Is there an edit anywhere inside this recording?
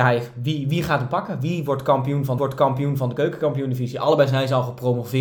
yes; 1 cut; at 2.4 s

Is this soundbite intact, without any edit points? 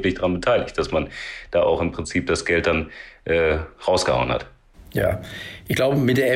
yes; 0 cuts

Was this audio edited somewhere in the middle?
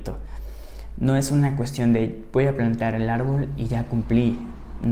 no; 0 cuts

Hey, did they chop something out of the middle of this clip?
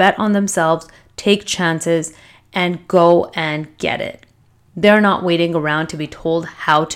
no; 0 cuts

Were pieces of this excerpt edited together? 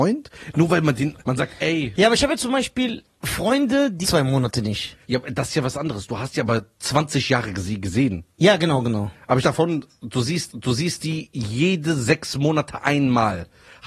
yes; 5 cuts; at 1.2 s, 4.0 s, 5.0 s, 9.4 s, 10.5 s

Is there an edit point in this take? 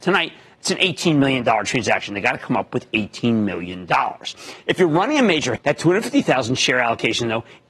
yes; 1 cut; at 5.6 s

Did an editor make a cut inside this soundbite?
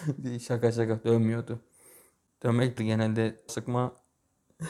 yes; 2 cuts; at 2.8 s, 3.5 s

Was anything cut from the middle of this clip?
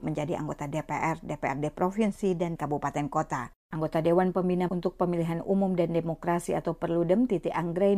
yes; 2 cuts; at 2.6 s, 4.7 s

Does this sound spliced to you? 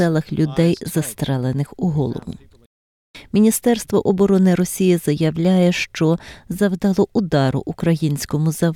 no; 0 cuts

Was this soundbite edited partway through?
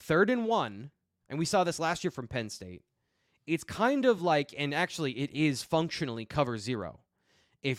no; 0 cuts

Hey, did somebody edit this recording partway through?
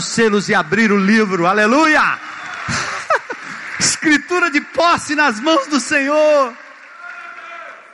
no; 0 cuts

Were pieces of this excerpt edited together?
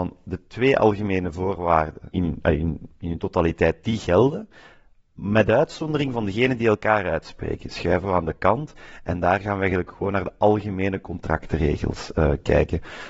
yes; 2 cuts; at 2.1 s, 7.6 s

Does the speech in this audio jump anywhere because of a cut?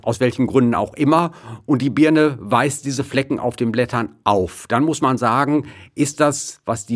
no; 0 cuts

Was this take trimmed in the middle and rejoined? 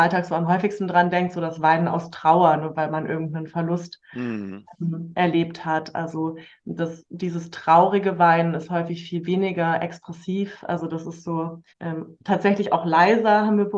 yes; 1 cut; at 11.7 s

